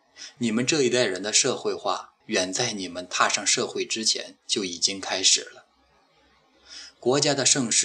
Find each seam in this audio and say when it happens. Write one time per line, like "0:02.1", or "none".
0:02.2